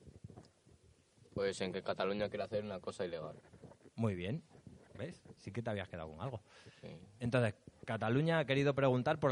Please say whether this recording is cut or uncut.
uncut